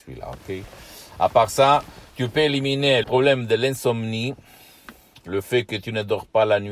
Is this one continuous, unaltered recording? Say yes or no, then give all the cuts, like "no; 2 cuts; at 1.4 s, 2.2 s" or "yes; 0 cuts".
no; 1 cut; at 3.0 s